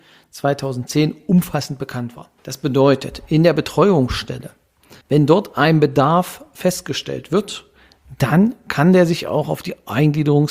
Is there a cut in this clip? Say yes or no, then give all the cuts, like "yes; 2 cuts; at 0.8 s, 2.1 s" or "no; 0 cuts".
yes; 2 cuts; at 2.4 s, 5.0 s